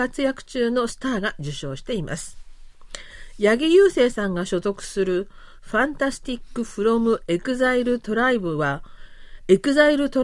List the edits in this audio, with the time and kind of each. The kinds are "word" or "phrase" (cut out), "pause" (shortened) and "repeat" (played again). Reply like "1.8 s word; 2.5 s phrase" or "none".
none